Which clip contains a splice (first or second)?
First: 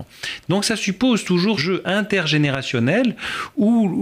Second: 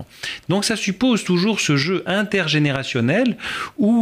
first